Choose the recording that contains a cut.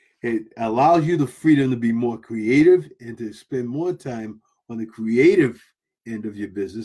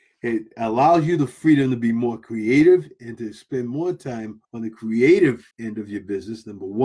second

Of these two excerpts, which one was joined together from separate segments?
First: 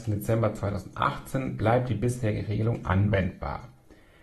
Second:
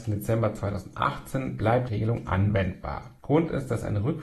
second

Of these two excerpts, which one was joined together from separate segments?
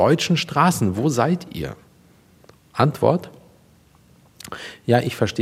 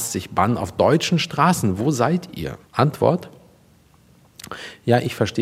second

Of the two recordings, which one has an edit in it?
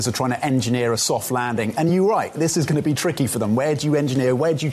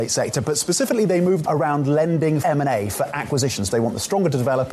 second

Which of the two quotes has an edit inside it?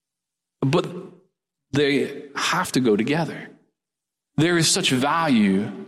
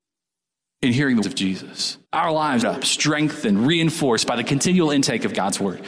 second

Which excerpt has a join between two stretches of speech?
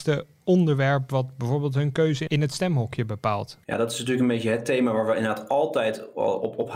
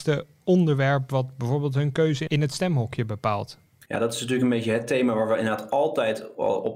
first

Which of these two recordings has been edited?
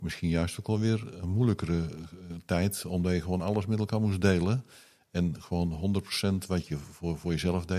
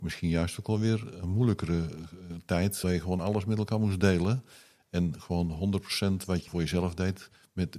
second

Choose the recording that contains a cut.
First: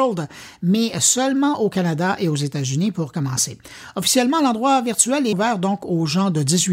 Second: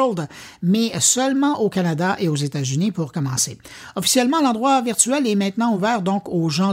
first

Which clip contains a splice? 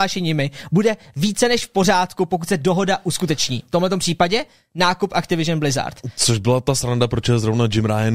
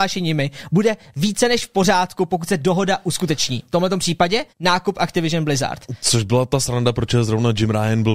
second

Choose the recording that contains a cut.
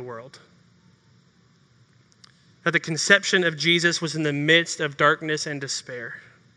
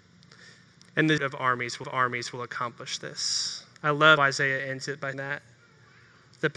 second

